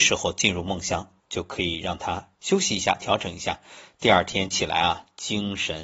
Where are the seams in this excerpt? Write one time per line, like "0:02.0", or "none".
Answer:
0:01.2
0:02.3